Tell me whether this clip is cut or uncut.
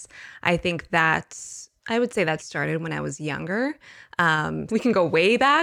cut